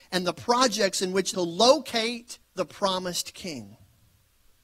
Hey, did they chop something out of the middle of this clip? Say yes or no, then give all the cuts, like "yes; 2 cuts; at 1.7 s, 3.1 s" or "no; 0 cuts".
yes; 2 cuts; at 1.3 s, 2.4 s